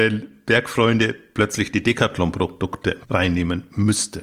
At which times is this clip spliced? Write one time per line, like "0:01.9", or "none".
0:03.0